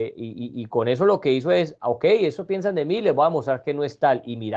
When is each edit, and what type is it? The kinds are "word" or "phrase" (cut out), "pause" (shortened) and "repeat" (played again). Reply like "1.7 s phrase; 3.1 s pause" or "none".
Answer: none